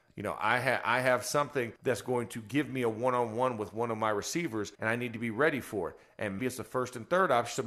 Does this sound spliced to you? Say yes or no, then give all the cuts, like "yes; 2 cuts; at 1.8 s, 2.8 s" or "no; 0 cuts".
yes; 3 cuts; at 1.8 s, 4.7 s, 6.4 s